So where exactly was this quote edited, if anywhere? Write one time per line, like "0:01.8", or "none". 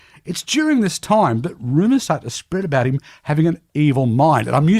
none